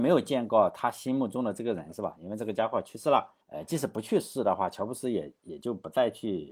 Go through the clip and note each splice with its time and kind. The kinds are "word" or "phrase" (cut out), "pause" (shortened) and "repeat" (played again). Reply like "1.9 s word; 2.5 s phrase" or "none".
3.4 s pause